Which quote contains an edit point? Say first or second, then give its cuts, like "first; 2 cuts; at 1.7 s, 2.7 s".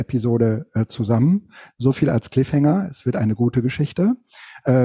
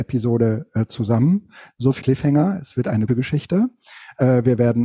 second; 2 cuts; at 2.0 s, 3.1 s